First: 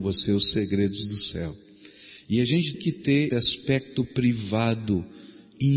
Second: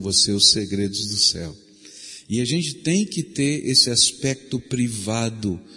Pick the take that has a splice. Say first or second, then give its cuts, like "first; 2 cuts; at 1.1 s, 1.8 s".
first; 2 cuts; at 2.7 s, 3.3 s